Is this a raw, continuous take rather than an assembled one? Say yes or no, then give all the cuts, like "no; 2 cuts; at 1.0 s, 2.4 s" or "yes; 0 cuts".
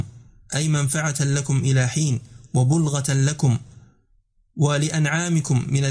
yes; 0 cuts